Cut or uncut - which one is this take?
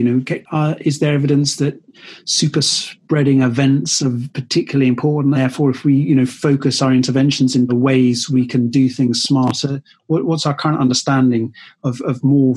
cut